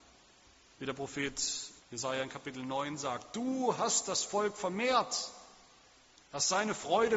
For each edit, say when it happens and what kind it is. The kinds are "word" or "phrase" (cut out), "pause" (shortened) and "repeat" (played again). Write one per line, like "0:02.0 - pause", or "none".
0:01.8 - pause